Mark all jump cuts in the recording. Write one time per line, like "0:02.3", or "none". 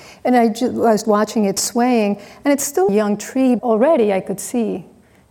0:01.0
0:02.9
0:03.6